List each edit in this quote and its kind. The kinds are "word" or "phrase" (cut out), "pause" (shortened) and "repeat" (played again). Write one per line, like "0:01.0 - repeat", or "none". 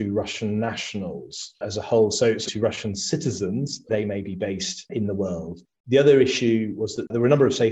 0:02.5 - word
0:03.9 - word